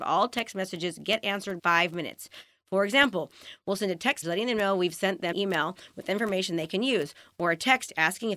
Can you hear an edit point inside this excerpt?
yes; 3 cuts; at 1.6 s, 4.2 s, 5.3 s

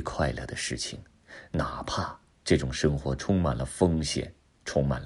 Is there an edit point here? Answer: no; 0 cuts

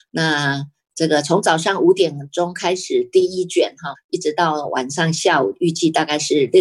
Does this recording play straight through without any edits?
no; 1 cut; at 3.9 s

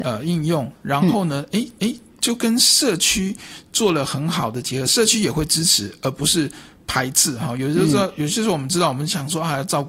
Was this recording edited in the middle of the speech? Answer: yes; 1 cut; at 1.8 s

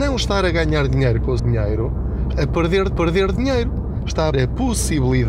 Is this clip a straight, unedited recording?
no; 4 cuts; at 1.4 s, 2.3 s, 2.9 s, 4.3 s

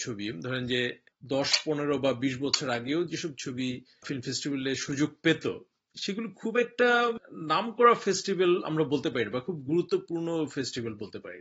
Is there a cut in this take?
no; 0 cuts

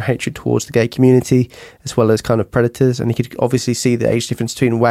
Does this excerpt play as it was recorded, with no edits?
yes; 0 cuts

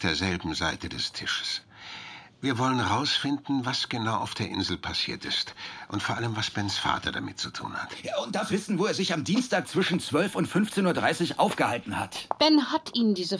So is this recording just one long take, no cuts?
no; 1 cut; at 8.5 s

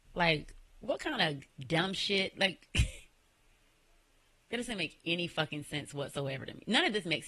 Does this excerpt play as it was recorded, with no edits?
no; 1 cut; at 1.5 s

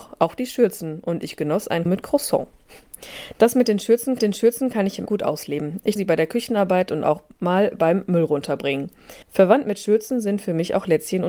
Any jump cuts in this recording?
yes; 5 cuts; at 1.9 s, 4.2 s, 5.1 s, 6.0 s, 9.2 s

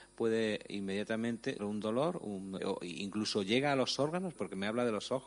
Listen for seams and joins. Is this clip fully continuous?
no; 3 cuts; at 1.6 s, 2.6 s, 4.4 s

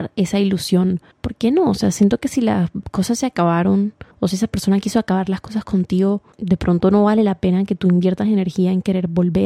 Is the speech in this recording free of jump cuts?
no; 3 cuts; at 1.1 s, 4.1 s, 6.3 s

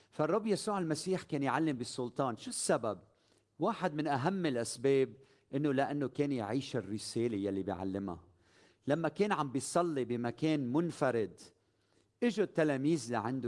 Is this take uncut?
yes; 0 cuts

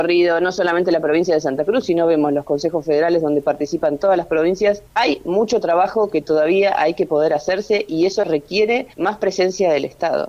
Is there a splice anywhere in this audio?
yes; 2 cuts; at 4.9 s, 8.9 s

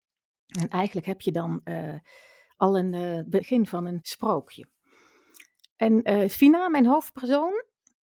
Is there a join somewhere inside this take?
no; 0 cuts

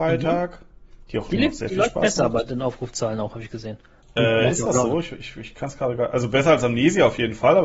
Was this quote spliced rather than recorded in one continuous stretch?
no; 0 cuts

